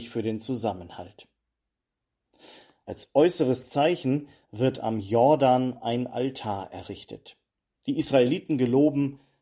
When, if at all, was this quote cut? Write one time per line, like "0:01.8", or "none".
none